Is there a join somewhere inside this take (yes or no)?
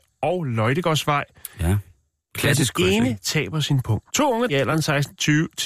yes